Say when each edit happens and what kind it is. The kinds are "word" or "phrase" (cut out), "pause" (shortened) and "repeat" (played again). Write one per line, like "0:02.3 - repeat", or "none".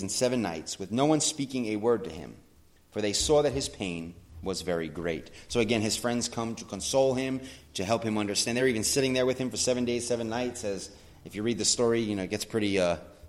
none